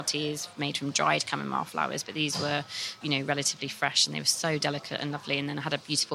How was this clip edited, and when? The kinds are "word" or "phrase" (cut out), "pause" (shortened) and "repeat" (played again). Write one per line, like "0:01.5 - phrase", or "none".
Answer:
0:03.0 - word